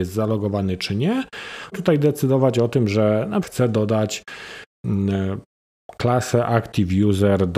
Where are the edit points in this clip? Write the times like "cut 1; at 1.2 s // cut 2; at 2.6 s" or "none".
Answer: cut 1; at 1.7 s // cut 2; at 3.4 s